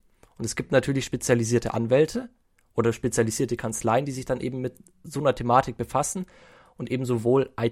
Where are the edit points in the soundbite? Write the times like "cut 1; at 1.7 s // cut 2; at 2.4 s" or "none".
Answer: none